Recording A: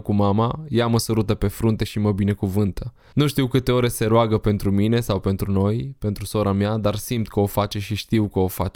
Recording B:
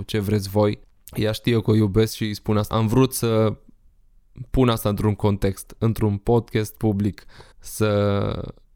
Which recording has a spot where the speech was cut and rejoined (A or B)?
B